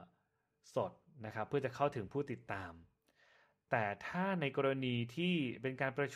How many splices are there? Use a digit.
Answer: 0